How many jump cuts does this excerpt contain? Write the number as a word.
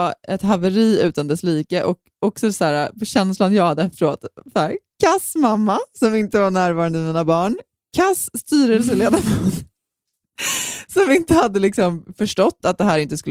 zero